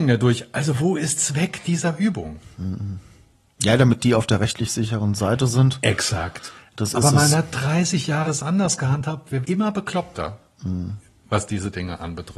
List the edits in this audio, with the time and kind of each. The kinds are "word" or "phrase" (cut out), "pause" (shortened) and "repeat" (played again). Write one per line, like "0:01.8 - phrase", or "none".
0:01.2 - word
0:08.2 - word
0:09.4 - word